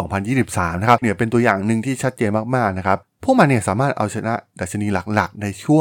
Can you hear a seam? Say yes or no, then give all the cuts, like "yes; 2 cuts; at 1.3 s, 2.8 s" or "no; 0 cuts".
yes; 1 cut; at 1.0 s